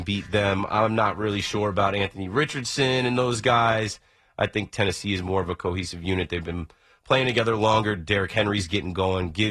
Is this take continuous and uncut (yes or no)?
yes